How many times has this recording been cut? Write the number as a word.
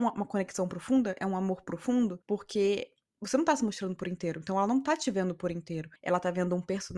two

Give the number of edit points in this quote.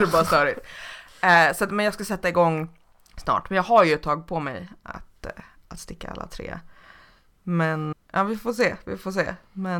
two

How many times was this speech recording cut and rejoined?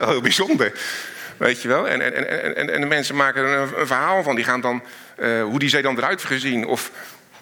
one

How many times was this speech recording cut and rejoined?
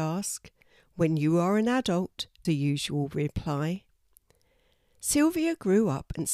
one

